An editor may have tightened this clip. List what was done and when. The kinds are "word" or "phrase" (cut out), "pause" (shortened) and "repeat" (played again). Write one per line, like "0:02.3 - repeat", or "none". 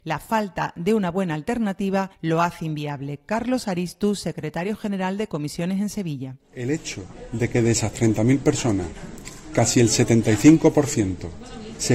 0:02.1 - pause